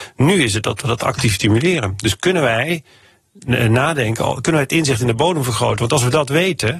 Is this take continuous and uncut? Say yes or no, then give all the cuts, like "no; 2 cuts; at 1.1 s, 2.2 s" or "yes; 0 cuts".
yes; 0 cuts